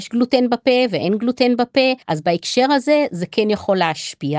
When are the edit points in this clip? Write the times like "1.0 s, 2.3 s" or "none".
2.0 s

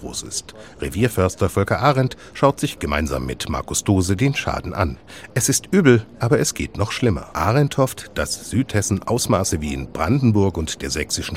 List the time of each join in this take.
7.3 s

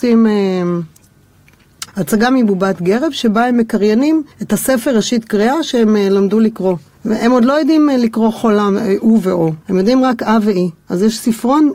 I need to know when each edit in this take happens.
1.9 s, 4.3 s, 6.9 s, 9.6 s

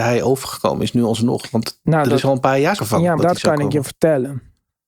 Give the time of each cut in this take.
2.8 s, 3.2 s

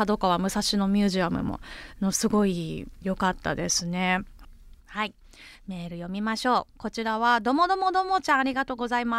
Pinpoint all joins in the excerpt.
4.8 s

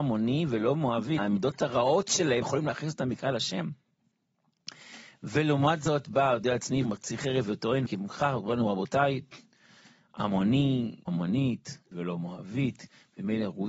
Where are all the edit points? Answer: 1.2 s, 2.4 s, 6.8 s, 7.9 s, 11.1 s, 11.9 s

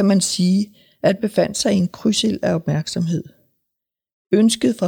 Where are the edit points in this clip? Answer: 1.2 s

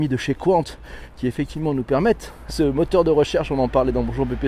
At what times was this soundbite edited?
2.5 s

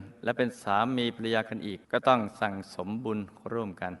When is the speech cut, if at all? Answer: 1.8 s

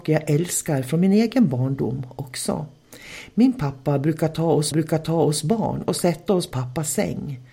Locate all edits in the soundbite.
4.7 s, 6.5 s

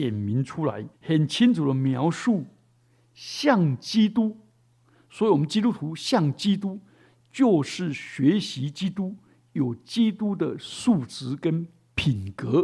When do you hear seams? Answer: 0.9 s

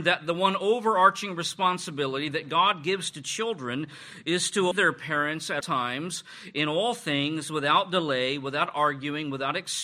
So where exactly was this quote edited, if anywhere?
4.7 s, 5.6 s

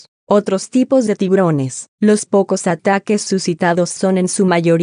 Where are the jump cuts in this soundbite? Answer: 1.9 s

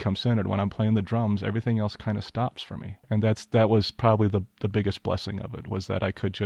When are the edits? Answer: 3.0 s

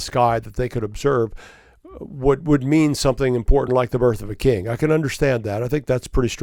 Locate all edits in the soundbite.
none

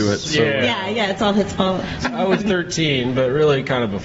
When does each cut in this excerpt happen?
2.0 s, 2.4 s

